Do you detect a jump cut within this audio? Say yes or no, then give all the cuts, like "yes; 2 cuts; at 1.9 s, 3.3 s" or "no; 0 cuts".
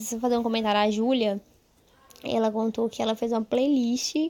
no; 0 cuts